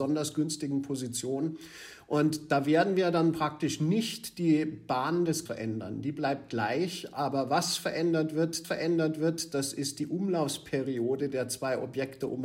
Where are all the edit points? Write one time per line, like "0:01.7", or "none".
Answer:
0:05.5
0:08.6